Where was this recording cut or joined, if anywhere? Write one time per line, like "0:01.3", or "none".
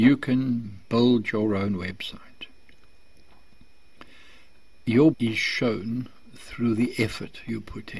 0:05.1